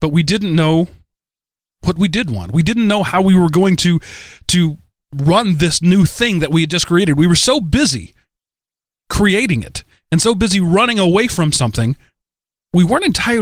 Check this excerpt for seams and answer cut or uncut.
uncut